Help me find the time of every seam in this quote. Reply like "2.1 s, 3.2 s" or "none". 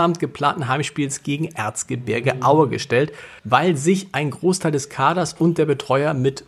3.4 s